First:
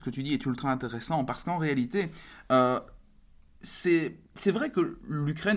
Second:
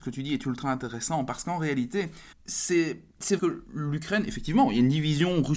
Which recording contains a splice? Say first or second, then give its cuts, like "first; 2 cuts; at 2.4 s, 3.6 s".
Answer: second; 2 cuts; at 2.3 s, 3.4 s